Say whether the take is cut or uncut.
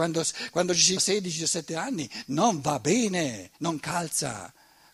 cut